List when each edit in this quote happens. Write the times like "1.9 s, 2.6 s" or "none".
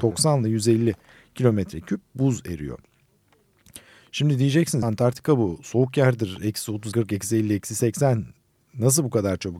4.8 s, 6.9 s